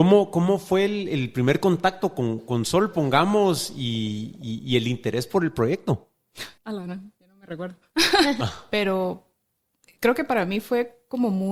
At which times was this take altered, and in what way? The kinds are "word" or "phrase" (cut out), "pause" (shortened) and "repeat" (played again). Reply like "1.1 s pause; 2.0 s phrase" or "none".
6.6 s pause